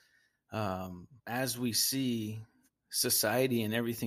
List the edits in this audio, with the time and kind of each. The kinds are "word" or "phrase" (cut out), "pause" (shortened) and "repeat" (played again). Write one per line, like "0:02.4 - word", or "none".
0:01.2 - pause
0:02.7 - pause